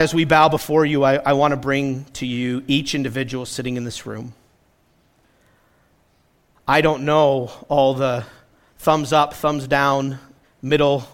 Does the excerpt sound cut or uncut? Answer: uncut